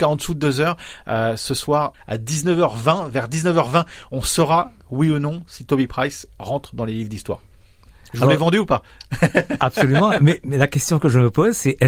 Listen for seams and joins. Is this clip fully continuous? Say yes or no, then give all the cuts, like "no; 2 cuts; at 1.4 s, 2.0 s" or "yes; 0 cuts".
yes; 0 cuts